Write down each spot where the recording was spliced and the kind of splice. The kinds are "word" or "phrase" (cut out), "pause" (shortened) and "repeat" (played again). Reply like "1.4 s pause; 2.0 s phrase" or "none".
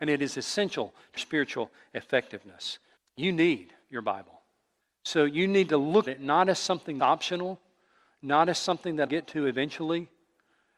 1.2 s word; 3.0 s pause; 3.8 s pause; 4.8 s pause; 6.1 s word; 7.0 s word; 9.1 s word